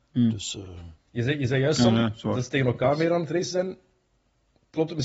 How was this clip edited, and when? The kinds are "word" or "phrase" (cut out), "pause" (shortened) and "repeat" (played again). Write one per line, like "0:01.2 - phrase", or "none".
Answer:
none

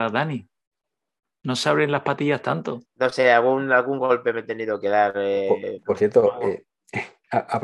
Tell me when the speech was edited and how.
0:02.8 - pause

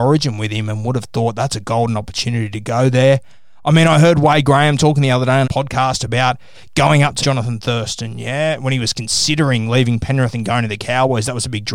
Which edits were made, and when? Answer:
0:05.4 - word
0:07.2 - word

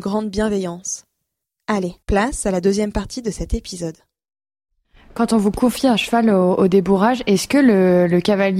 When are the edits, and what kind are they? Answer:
0:02.0 - pause

